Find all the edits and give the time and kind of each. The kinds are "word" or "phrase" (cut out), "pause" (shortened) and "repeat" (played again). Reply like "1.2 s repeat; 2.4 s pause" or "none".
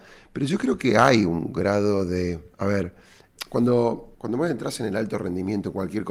2.5 s pause; 4.1 s pause